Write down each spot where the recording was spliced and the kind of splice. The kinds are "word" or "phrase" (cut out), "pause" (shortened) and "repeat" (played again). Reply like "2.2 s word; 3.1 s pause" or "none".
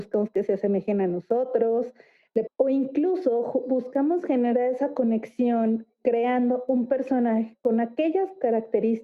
2.5 s phrase